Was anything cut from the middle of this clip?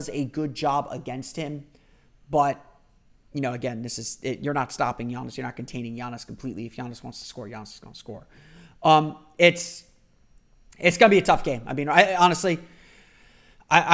no; 0 cuts

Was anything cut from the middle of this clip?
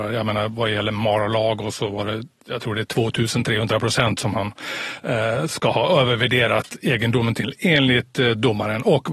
no; 0 cuts

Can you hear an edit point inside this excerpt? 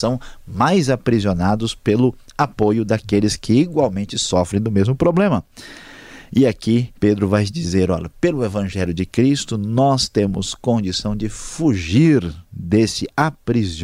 yes; 1 cut; at 7.0 s

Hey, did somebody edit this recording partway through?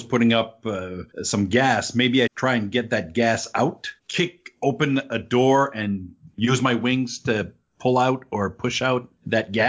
yes; 3 cuts; at 1.1 s, 2.3 s, 4.0 s

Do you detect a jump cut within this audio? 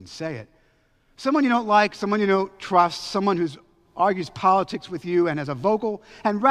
no; 0 cuts

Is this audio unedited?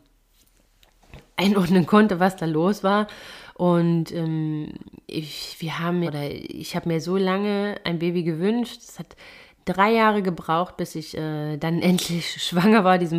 no; 1 cut; at 6.1 s

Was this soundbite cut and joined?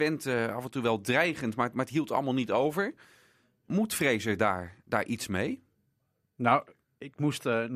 no; 0 cuts

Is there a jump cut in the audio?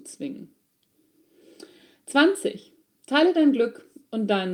no; 0 cuts

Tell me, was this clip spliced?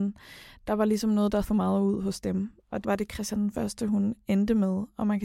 yes; 2 cuts; at 1.4 s, 2.8 s

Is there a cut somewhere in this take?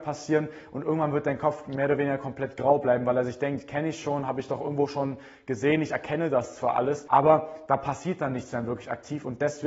no; 0 cuts

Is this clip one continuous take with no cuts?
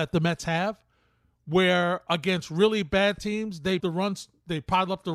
no; 1 cut; at 3.8 s

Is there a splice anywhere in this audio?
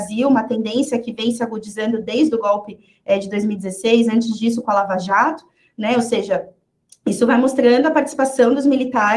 no; 0 cuts

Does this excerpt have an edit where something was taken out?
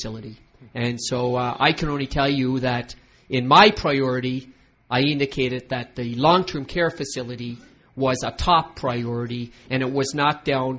no; 0 cuts

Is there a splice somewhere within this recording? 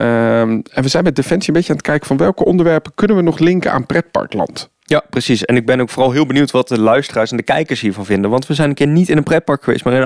no; 0 cuts

